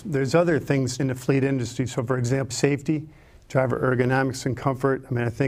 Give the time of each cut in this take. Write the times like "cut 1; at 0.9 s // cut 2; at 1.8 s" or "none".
cut 1; at 1.0 s // cut 2; at 2.5 s